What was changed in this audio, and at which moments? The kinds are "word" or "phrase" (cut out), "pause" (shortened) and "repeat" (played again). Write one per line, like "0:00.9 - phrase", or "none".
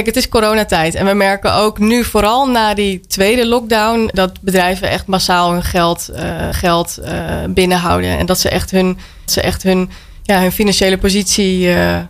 0:04.1 - word
0:06.5 - repeat
0:09.3 - repeat